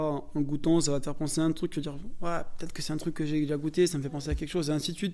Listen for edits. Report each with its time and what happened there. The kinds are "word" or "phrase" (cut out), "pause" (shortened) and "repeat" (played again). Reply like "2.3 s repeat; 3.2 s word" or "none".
none